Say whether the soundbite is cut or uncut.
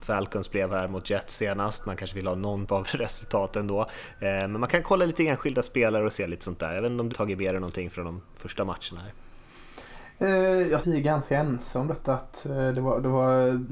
cut